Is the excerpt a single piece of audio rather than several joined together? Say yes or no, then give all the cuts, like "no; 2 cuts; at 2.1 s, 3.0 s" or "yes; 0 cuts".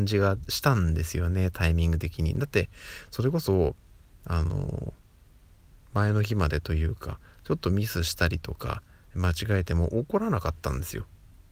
yes; 0 cuts